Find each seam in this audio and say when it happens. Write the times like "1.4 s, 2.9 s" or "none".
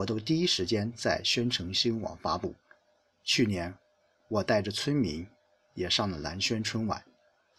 none